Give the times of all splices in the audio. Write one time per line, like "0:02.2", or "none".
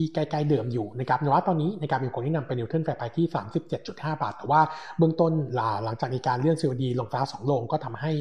none